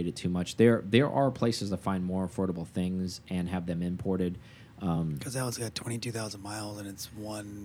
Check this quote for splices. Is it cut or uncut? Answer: uncut